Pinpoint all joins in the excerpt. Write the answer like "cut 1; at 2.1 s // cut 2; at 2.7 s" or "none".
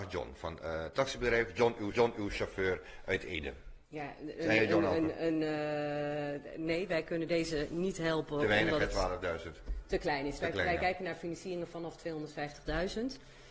cut 1; at 1.9 s // cut 2; at 3.8 s